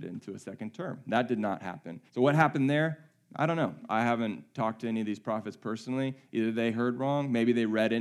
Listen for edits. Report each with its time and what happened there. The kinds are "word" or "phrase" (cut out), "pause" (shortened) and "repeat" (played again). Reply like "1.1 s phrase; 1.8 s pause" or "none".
2.1 s pause